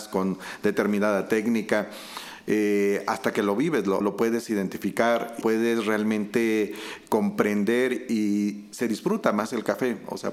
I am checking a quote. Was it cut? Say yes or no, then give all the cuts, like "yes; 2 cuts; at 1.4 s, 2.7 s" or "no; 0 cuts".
yes; 2 cuts; at 4.0 s, 5.4 s